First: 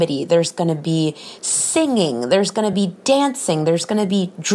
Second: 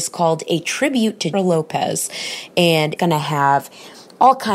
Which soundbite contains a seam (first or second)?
second